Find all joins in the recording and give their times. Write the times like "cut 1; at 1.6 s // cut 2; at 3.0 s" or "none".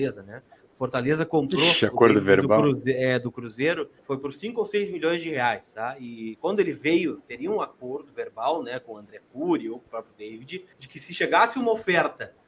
cut 1; at 4.0 s // cut 2; at 10.7 s